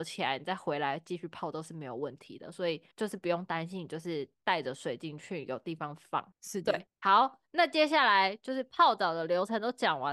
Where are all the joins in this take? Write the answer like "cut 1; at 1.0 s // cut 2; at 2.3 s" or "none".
cut 1; at 2.9 s